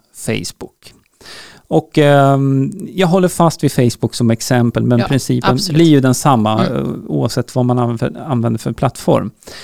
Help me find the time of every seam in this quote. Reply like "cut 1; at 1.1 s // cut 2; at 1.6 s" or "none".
none